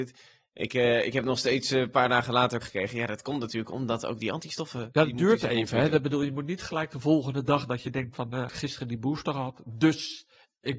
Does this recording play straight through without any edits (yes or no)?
no